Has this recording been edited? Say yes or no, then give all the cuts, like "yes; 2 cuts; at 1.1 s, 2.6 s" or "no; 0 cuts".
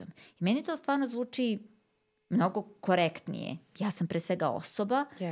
no; 0 cuts